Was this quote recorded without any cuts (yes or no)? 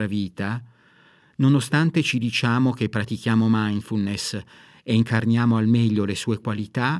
yes